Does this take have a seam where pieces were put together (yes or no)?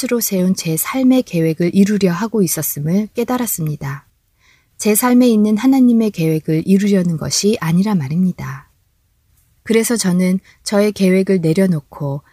no